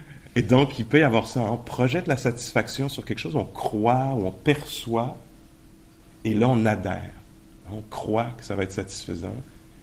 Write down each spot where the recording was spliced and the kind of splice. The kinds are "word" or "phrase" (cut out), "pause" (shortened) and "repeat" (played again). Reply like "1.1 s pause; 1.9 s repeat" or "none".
none